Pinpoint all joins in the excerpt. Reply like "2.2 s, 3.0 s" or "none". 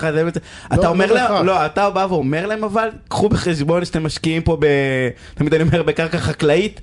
none